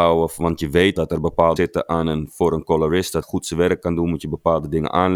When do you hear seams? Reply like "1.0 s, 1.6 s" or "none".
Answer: 0.9 s, 1.6 s, 3.2 s